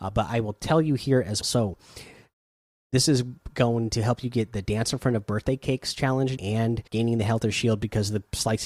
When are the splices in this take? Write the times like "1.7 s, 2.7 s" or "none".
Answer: 1.4 s, 6.4 s, 6.9 s